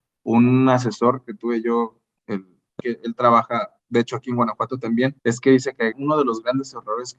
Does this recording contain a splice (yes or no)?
yes